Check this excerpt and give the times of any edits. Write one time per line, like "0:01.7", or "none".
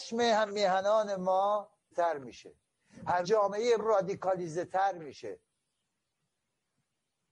0:01.9
0:03.2
0:03.8